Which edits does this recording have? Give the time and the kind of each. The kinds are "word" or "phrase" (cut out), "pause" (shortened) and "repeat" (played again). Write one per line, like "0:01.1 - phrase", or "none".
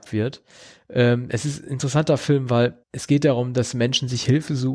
0:02.8 - pause